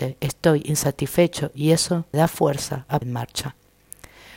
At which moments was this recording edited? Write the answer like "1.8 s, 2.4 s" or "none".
2.1 s, 3.0 s